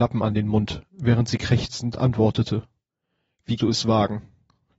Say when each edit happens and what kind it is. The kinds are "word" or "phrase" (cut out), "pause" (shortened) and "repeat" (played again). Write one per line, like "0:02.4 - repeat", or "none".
0:03.6 - word